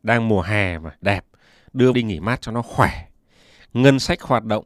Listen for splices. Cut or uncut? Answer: cut